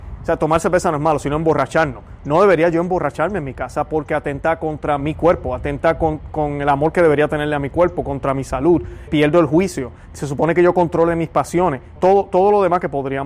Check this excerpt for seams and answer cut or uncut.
cut